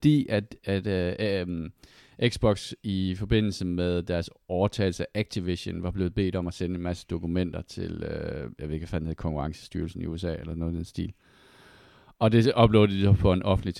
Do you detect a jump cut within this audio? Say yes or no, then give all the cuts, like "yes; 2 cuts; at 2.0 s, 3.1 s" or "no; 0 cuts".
no; 0 cuts